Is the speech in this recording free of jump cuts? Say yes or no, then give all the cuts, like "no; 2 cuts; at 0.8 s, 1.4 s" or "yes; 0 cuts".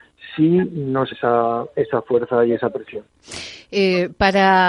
no; 1 cut; at 1.1 s